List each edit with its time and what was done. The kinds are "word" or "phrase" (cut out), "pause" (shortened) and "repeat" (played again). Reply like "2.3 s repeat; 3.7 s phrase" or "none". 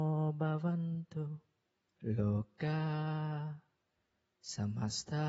1.8 s pause